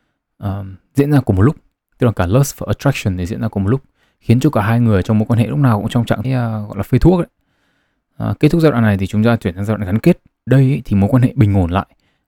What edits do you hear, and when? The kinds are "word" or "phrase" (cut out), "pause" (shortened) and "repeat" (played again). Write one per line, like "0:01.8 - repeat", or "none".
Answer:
0:06.2 - word
0:10.5 - word